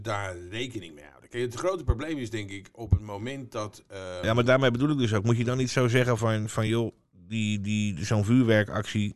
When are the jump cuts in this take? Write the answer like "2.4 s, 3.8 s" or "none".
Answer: none